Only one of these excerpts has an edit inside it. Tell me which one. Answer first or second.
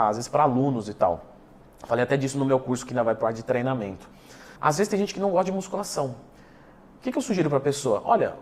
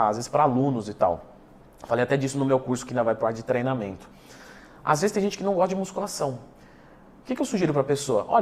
first